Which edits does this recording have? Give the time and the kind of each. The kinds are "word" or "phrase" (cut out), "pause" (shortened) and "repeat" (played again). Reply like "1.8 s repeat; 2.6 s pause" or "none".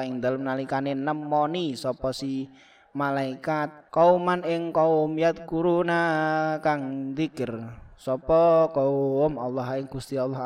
3.9 s pause